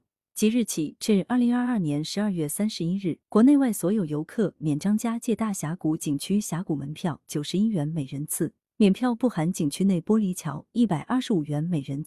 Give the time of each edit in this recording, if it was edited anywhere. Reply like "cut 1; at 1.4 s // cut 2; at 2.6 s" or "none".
cut 1; at 3.2 s // cut 2; at 8.6 s